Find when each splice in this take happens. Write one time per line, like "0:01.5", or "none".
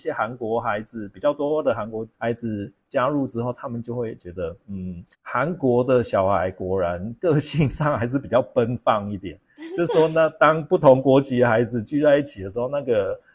0:02.1
0:05.1